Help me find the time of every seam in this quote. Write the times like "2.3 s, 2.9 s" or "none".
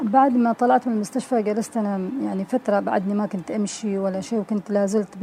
none